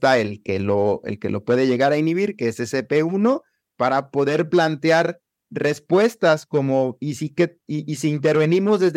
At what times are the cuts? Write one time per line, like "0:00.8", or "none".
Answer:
none